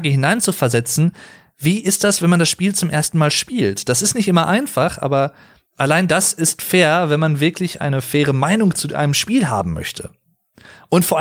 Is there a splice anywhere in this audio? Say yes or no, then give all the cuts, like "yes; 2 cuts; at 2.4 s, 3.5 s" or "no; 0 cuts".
no; 0 cuts